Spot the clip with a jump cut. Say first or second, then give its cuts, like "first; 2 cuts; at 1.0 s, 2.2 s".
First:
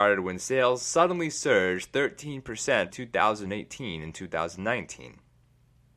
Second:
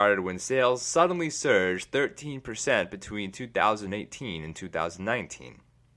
first; 1 cut; at 2.9 s